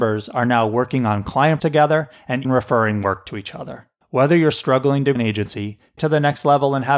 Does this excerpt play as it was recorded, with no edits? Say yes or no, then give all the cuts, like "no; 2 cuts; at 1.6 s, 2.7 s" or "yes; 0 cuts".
no; 5 cuts; at 1.6 s, 2.4 s, 4.0 s, 5.2 s, 6.0 s